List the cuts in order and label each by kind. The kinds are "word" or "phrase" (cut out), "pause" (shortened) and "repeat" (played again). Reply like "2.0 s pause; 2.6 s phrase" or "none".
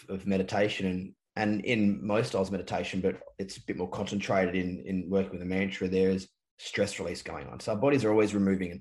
none